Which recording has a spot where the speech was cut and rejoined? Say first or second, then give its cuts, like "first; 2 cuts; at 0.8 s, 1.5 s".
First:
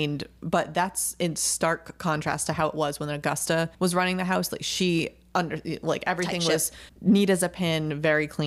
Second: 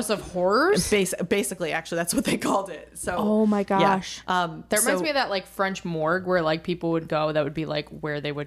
first; 2 cuts; at 3.7 s, 6.9 s